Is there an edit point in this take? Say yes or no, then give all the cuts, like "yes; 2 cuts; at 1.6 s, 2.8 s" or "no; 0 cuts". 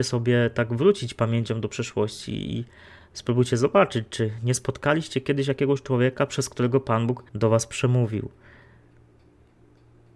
yes; 1 cut; at 7.3 s